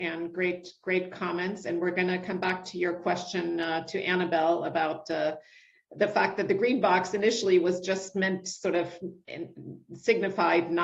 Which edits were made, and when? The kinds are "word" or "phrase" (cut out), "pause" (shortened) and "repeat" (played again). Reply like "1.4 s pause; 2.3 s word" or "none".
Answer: none